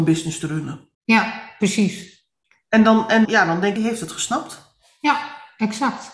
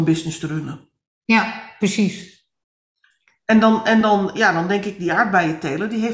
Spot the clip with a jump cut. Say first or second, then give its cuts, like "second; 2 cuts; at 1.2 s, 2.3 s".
first; 4 cuts; at 0.9 s, 2.4 s, 3.2 s, 3.8 s